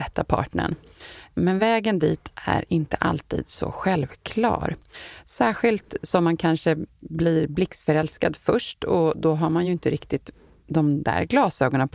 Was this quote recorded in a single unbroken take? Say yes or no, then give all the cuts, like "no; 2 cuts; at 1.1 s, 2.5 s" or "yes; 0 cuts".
yes; 0 cuts